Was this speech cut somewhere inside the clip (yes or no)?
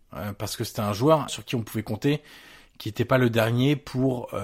yes